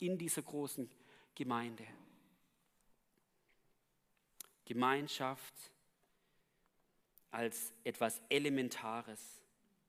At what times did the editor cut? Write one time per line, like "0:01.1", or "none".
none